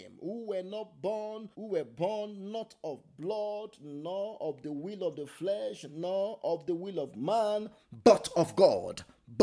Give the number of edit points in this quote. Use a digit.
1